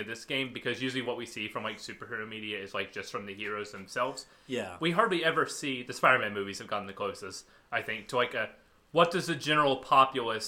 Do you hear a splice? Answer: no; 0 cuts

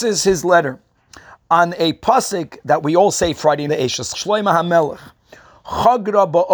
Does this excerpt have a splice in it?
yes; 2 cuts; at 3.7 s, 4.1 s

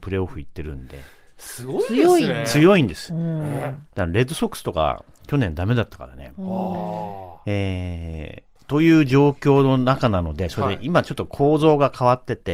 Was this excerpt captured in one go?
no; 1 cut; at 8.6 s

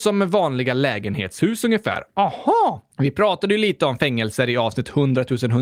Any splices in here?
yes; 1 cut; at 2.9 s

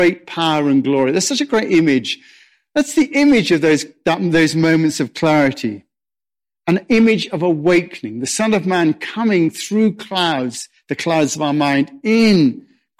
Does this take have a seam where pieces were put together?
no; 0 cuts

